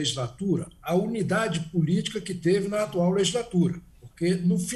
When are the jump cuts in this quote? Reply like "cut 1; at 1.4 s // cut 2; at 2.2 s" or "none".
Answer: none